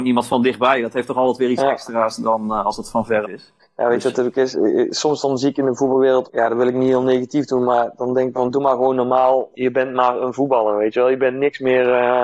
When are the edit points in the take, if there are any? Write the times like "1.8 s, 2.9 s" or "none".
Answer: 3.2 s, 6.2 s, 8.3 s, 9.5 s